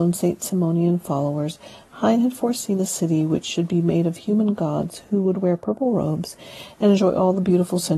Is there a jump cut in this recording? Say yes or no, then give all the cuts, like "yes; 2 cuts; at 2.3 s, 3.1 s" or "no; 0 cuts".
no; 0 cuts